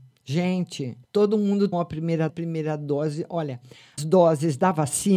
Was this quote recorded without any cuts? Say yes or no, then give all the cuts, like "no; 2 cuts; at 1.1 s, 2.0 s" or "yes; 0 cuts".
no; 4 cuts; at 1.0 s, 1.7 s, 2.3 s, 4.0 s